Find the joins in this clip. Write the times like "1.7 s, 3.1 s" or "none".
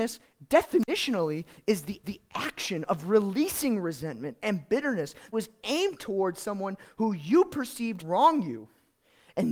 2.0 s, 5.3 s, 8.0 s